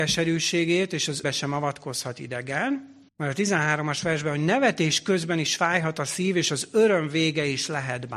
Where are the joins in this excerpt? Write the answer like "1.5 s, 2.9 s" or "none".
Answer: 1.2 s, 3.1 s